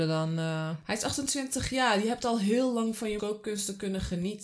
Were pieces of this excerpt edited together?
yes; 1 cut; at 3.2 s

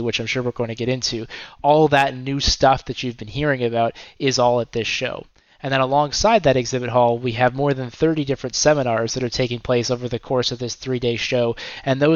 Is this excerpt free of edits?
yes; 0 cuts

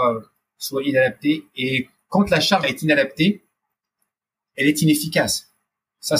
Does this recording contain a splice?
yes; 1 cut; at 2.6 s

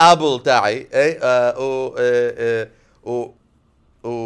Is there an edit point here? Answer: no; 0 cuts

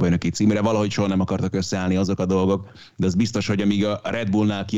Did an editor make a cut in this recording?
no; 0 cuts

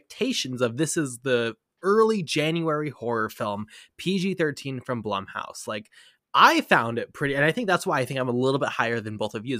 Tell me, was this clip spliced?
no; 0 cuts

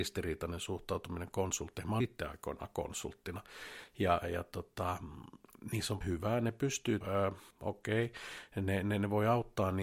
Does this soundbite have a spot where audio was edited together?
yes; 5 cuts; at 2.0 s, 4.2 s, 6.0 s, 7.0 s, 7.5 s

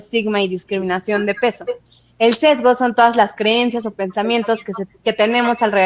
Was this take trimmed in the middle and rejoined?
no; 0 cuts

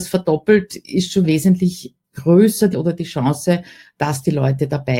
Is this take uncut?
no; 3 cuts; at 1.2 s, 2.0 s, 2.7 s

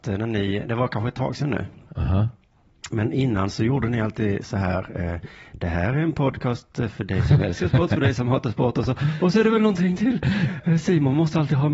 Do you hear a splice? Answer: no; 0 cuts

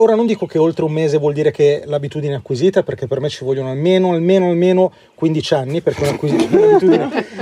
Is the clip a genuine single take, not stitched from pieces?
yes; 0 cuts

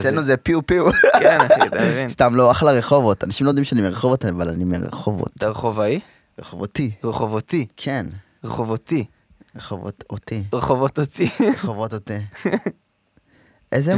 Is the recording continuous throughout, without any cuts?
yes; 0 cuts

